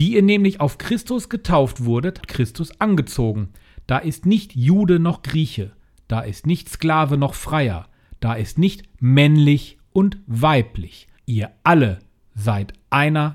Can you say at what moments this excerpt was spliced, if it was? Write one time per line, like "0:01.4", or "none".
0:02.2
0:11.2